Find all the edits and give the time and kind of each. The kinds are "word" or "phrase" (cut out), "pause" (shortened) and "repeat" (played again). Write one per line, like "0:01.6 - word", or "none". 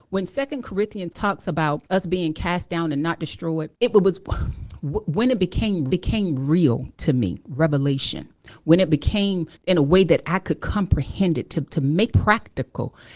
0:01.1 - word
0:01.9 - pause
0:03.7 - pause
0:05.9 - repeat
0:09.6 - pause
0:12.1 - word